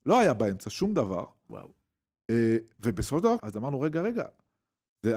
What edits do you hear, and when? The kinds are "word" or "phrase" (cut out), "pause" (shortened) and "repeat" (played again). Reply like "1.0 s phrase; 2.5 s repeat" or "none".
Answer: 3.4 s word